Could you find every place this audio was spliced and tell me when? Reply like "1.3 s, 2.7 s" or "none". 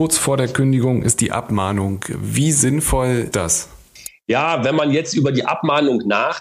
3.3 s